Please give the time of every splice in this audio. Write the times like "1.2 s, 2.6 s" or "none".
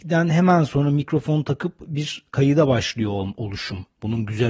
none